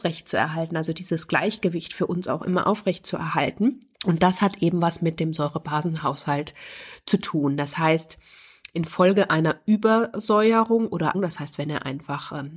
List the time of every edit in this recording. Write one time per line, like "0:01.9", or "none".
0:03.9
0:11.1